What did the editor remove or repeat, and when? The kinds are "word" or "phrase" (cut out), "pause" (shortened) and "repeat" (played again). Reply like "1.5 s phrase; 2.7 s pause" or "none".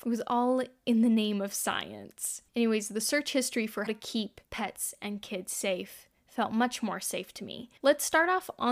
2.5 s pause; 3.9 s word; 7.8 s pause